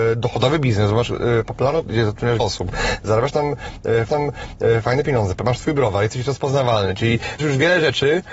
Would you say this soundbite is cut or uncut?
cut